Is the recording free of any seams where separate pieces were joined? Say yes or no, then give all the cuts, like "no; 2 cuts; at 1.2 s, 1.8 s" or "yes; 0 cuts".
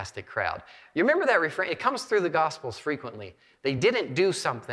yes; 0 cuts